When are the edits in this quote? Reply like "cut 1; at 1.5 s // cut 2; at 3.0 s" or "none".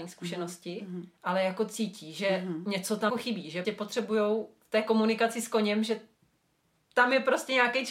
cut 1; at 3.1 s // cut 2; at 3.6 s